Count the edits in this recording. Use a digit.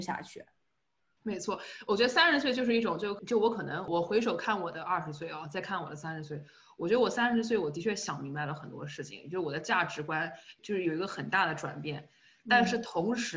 0